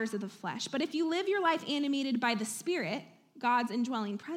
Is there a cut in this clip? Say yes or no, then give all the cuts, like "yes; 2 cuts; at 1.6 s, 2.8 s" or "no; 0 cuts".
no; 0 cuts